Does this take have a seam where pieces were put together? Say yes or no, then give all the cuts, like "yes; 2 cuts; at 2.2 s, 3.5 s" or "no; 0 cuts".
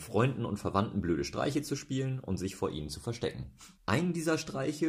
yes; 1 cut; at 3.8 s